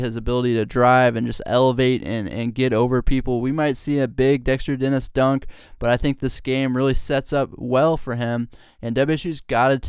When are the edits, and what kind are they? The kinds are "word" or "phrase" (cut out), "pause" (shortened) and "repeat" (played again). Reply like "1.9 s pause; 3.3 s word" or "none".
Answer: none